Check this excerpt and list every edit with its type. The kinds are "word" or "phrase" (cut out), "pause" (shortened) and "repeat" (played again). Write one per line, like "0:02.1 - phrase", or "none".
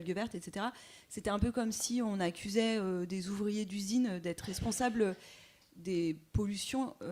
none